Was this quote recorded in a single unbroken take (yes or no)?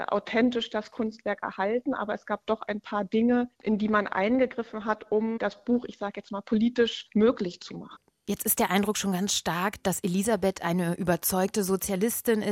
yes